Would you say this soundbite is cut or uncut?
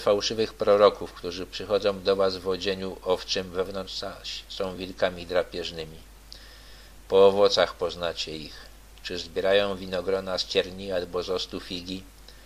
uncut